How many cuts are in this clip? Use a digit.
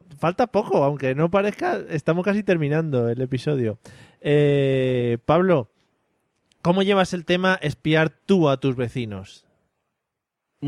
0